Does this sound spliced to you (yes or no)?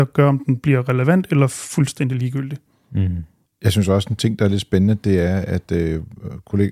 no